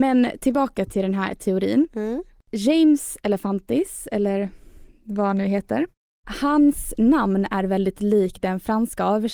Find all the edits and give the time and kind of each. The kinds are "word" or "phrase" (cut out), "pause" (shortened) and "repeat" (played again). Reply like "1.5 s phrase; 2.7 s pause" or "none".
none